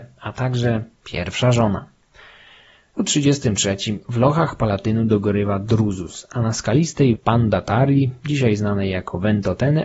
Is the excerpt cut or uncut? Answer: cut